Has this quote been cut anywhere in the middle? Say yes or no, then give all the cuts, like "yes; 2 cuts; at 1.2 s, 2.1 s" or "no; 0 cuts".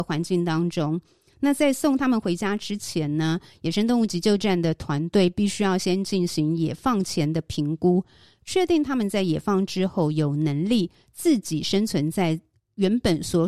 no; 0 cuts